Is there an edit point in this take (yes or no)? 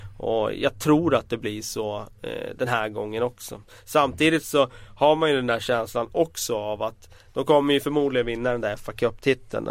no